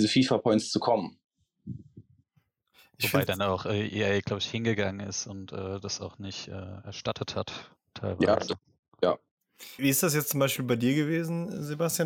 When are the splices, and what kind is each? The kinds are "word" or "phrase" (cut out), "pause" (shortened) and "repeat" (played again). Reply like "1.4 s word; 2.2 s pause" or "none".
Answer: 9.8 s word